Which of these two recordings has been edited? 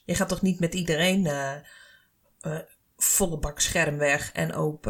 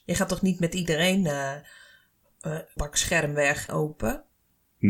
second; 2 cuts; at 2.8 s, 3.7 s

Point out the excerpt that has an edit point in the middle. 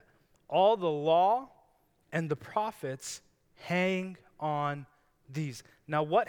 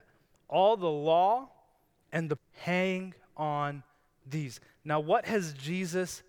second; 1 cut; at 2.4 s

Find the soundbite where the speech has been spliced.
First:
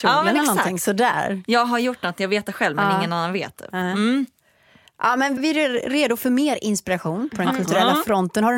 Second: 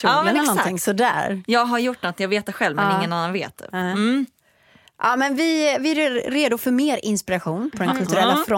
first; 1 cut; at 5.4 s

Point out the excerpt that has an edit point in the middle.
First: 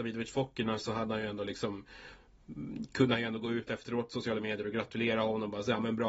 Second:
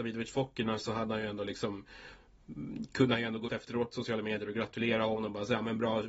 second; 1 cut; at 3.5 s

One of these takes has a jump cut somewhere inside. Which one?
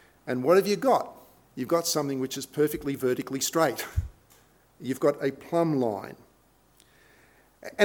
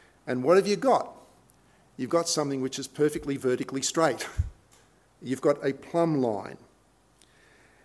first; 1 cut; at 1.4 s

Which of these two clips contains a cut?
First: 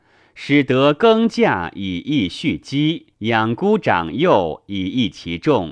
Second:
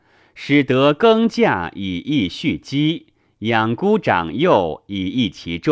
first; 1 cut; at 3.1 s

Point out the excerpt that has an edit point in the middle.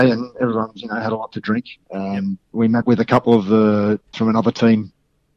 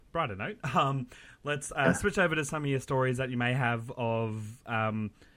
first; 3 cuts; at 2.4 s, 2.8 s, 4.1 s

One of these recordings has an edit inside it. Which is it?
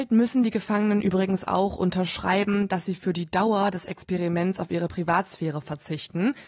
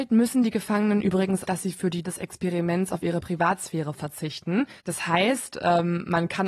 second; 3 cuts; at 1.4 s, 2.0 s, 4.8 s

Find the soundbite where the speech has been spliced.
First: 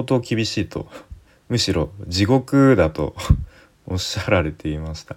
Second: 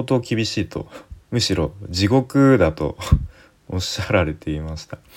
second; 1 cut; at 1.2 s

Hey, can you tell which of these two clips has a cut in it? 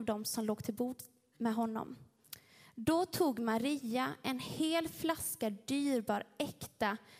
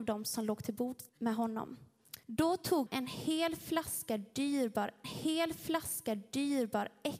second; 4 cuts; at 1.1 s, 2.2 s, 2.9 s, 5.0 s

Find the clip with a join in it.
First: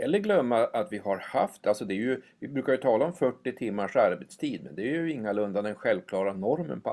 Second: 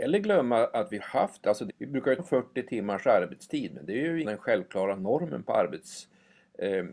second; 4 cuts; at 1.0 s, 1.7 s, 2.2 s, 4.2 s

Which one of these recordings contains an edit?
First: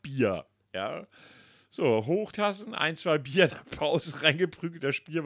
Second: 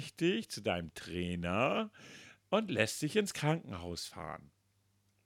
first; 1 cut; at 2.3 s

